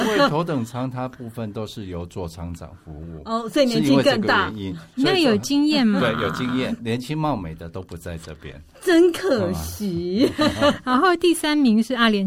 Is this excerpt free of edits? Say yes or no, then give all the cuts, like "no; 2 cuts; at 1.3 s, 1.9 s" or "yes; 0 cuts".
no; 1 cut; at 6.8 s